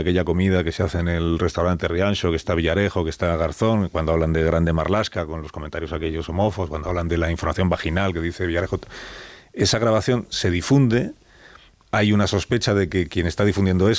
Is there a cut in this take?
no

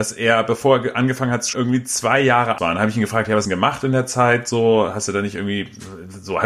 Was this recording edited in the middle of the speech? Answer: yes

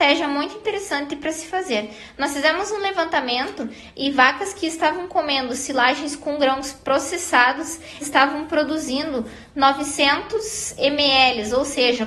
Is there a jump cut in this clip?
yes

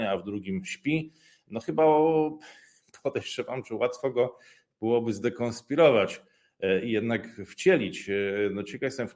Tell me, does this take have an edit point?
no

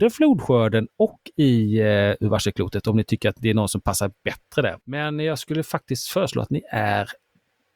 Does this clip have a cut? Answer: yes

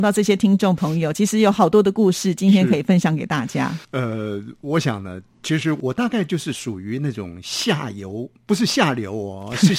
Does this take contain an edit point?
yes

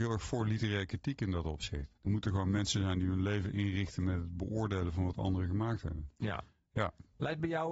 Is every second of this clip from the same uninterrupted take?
no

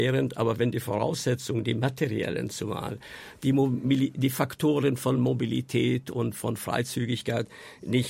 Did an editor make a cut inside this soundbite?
no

